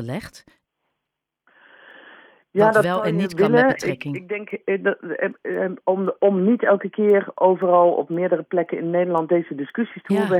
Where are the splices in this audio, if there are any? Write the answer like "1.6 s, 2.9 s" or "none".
none